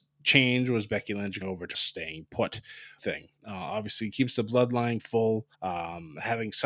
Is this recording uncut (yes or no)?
no